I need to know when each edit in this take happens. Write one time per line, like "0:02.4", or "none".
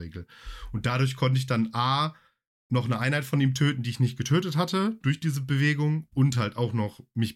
none